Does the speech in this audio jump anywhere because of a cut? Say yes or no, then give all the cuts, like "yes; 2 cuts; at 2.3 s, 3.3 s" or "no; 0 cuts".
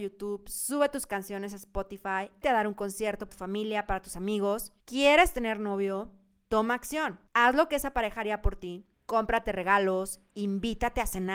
yes; 5 cuts; at 2.4 s, 3.3 s, 4.8 s, 7.3 s, 8.9 s